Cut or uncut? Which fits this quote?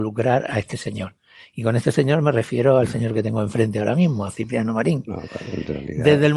uncut